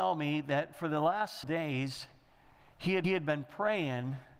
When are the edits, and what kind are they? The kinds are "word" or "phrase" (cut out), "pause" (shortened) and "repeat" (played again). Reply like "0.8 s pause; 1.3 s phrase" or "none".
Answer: 1.4 s word; 3.0 s repeat